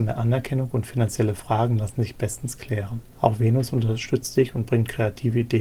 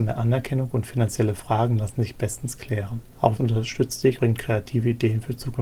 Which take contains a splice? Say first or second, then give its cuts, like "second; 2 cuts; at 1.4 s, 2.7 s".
second; 2 cuts; at 3.4 s, 4.2 s